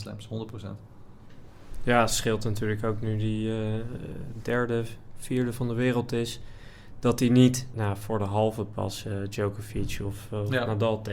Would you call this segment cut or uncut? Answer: cut